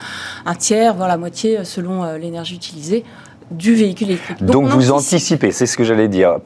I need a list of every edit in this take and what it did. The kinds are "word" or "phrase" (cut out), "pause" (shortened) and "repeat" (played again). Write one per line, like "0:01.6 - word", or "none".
none